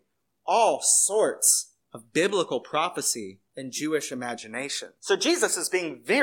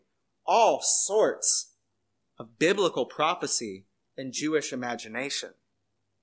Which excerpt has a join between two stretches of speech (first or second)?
first